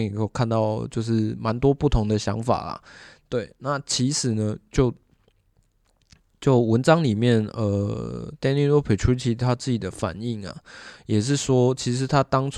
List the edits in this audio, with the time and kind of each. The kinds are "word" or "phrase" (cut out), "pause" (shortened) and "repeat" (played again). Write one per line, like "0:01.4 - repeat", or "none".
none